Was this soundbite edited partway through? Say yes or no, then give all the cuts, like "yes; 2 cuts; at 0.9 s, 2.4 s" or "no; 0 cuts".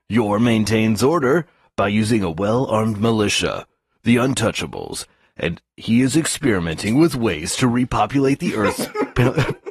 no; 0 cuts